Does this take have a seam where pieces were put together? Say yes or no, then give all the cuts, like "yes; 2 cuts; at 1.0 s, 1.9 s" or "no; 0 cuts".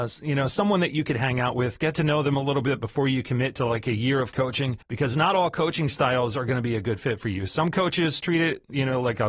yes; 1 cut; at 4.8 s